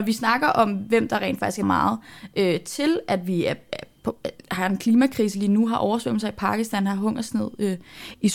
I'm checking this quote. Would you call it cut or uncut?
cut